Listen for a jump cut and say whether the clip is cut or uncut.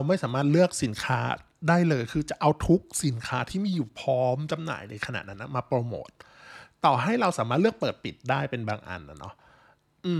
uncut